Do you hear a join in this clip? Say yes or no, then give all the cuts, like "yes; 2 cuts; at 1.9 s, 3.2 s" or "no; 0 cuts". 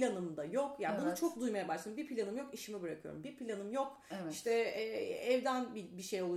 no; 0 cuts